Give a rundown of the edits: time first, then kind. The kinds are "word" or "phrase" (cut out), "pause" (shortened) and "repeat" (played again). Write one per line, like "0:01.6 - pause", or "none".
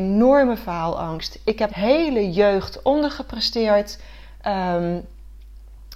0:01.7 - word